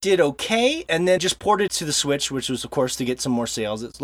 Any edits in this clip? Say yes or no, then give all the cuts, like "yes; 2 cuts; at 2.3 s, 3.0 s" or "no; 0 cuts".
yes; 2 cuts; at 1.2 s, 1.7 s